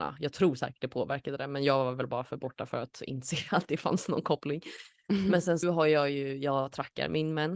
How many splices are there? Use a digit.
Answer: 1